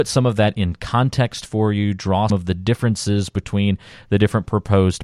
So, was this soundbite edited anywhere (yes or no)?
yes